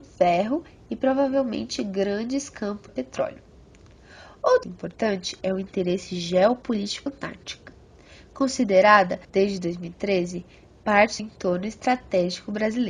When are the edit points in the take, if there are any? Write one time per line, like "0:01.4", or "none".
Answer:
0:02.9
0:04.6
0:07.1
0:09.2
0:11.2